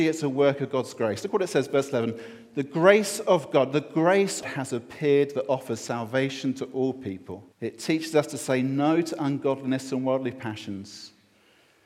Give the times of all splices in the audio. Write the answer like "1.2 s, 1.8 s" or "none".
4.4 s, 7.5 s